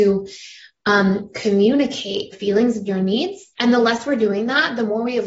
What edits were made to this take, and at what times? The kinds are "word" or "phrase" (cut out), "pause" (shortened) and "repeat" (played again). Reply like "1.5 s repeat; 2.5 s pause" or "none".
2.3 s word; 3.5 s pause